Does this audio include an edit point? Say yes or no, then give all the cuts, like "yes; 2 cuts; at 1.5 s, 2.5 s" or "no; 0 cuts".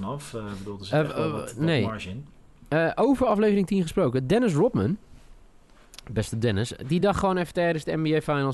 no; 0 cuts